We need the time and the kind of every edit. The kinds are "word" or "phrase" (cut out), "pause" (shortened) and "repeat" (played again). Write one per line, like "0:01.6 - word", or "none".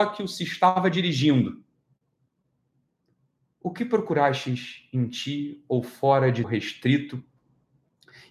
0:06.4 - word

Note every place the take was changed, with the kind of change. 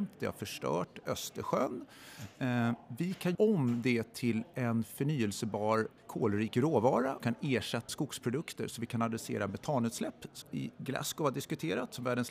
0:03.3 - word
0:06.0 - pause
0:07.2 - word
0:07.9 - phrase
0:10.4 - word

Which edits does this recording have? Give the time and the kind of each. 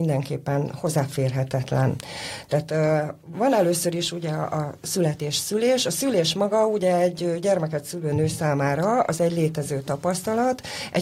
0:03.3 - word

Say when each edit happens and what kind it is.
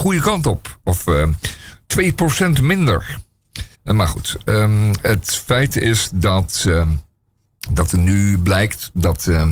0:03.7 - pause

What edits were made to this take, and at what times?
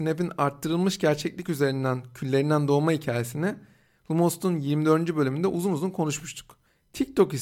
none

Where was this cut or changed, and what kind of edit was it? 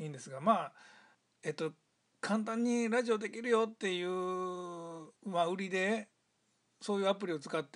0:01.1 - pause
0:05.2 - pause

